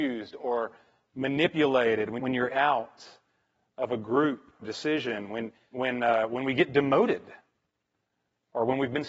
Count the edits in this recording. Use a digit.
4